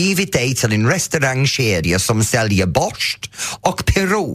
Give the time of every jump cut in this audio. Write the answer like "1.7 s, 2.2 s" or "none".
none